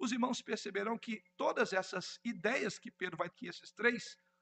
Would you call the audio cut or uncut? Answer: cut